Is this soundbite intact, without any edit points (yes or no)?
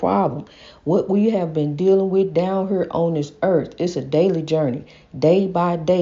yes